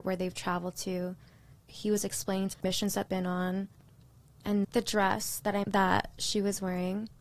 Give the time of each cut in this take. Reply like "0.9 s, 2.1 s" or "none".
1.6 s, 2.5 s, 3.1 s, 4.6 s, 5.6 s